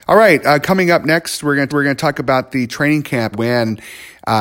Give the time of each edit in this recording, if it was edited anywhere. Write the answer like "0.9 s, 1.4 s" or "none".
1.7 s, 3.3 s